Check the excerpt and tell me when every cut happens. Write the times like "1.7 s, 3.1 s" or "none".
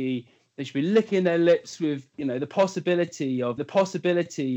2.1 s, 3.6 s